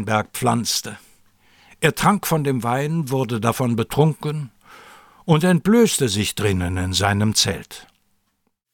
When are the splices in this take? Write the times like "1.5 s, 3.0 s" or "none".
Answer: none